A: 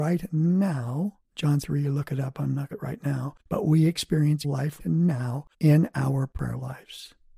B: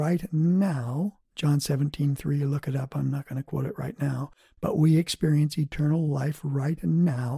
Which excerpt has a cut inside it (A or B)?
A